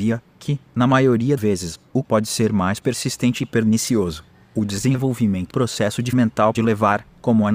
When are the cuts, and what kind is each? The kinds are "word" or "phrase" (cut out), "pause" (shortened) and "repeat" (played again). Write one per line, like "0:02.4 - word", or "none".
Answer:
0:01.4 - word
0:02.0 - word
0:05.5 - word
0:06.1 - word
0:06.5 - word